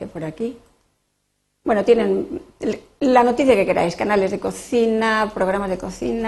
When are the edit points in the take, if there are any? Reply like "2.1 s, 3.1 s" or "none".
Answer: none

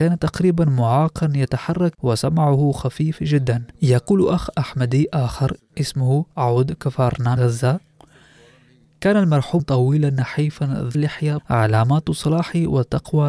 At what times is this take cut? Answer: 1.9 s, 3.7 s, 6.3 s, 7.4 s, 9.6 s, 10.9 s, 11.4 s

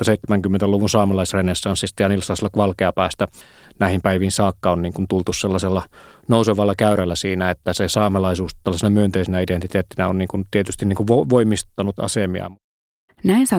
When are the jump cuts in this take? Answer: none

